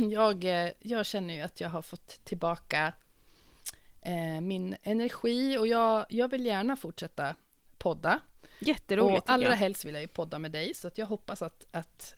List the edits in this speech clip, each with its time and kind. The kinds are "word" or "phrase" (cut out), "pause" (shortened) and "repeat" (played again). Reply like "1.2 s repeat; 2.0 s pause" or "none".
none